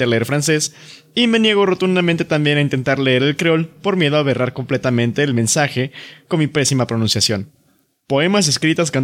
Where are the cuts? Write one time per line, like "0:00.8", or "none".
none